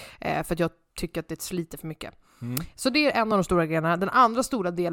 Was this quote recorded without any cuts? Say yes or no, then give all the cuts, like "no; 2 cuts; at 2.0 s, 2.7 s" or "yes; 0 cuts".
yes; 0 cuts